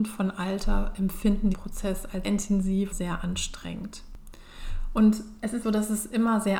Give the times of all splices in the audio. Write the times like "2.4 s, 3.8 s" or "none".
1.5 s, 2.2 s, 2.9 s, 5.6 s